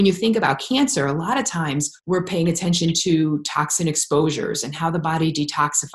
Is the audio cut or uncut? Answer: cut